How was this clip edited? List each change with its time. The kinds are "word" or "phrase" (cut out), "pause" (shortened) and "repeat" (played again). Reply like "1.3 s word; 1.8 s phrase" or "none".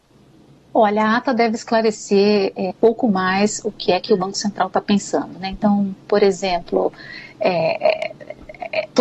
2.7 s word